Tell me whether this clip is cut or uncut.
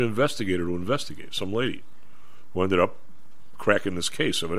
uncut